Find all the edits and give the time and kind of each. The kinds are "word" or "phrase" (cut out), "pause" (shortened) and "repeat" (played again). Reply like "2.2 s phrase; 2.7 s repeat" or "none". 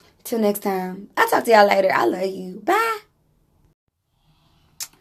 none